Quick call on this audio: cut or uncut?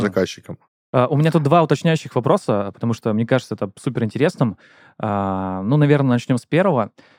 uncut